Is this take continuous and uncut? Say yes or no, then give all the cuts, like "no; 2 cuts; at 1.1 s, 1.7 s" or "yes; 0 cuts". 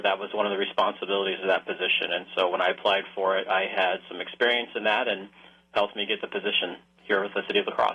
yes; 0 cuts